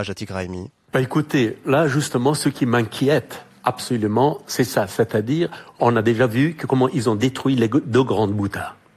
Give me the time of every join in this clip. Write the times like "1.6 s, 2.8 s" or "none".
none